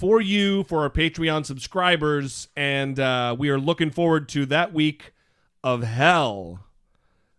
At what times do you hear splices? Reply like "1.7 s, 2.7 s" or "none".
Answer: none